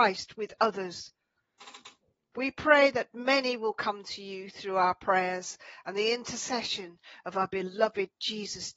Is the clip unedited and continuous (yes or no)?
yes